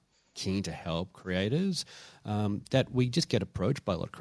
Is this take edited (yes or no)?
no